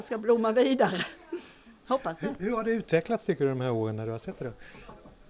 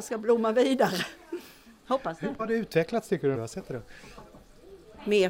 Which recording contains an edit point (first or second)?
second